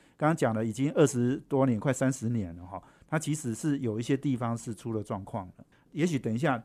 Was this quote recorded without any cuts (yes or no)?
yes